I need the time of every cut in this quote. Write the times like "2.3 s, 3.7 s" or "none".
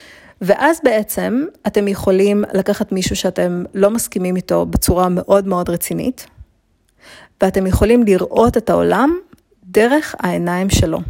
none